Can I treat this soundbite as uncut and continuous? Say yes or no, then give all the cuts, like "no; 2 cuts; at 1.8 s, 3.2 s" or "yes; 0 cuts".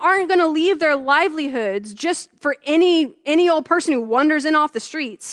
yes; 0 cuts